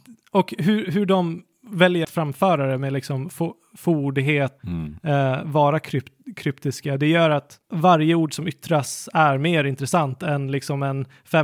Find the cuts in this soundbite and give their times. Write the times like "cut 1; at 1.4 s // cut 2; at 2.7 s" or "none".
cut 1; at 2.0 s // cut 2; at 4.6 s // cut 3; at 7.6 s